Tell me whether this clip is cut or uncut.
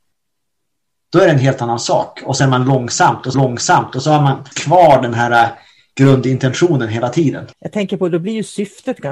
cut